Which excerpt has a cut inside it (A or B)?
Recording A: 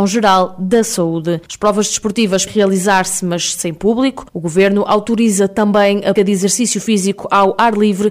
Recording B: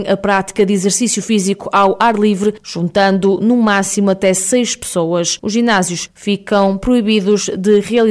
A